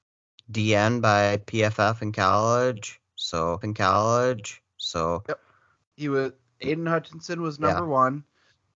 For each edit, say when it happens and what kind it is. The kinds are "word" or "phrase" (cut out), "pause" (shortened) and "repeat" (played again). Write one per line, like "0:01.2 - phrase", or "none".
0:03.6 - repeat